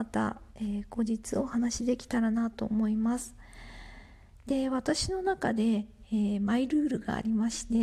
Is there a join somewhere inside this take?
no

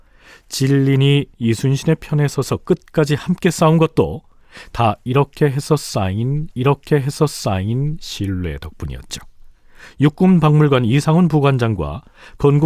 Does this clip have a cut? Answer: yes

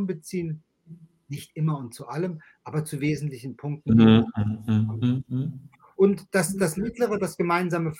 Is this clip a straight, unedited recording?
yes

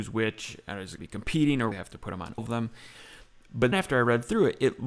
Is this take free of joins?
no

